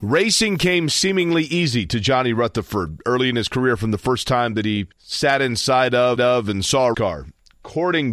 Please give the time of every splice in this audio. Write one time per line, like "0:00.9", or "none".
0:04.9
0:06.2
0:06.9